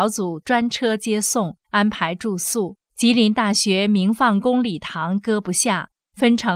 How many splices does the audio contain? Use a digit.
1